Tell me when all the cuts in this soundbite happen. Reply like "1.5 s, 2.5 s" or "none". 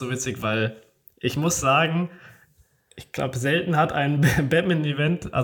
none